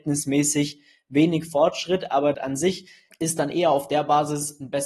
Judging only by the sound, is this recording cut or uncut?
cut